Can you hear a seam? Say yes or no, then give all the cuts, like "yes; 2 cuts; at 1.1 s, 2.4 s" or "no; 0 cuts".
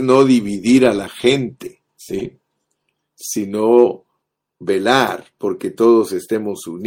yes; 2 cuts; at 1.9 s, 4.2 s